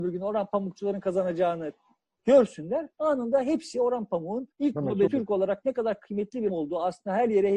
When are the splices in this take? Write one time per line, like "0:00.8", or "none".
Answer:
0:02.9
0:04.5
0:05.1
0:06.5